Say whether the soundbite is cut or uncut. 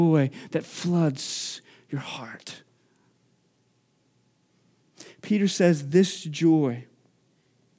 uncut